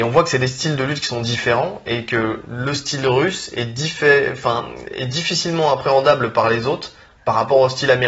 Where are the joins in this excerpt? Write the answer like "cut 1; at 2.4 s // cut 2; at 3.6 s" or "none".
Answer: none